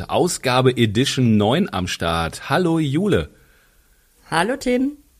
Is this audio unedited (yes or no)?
yes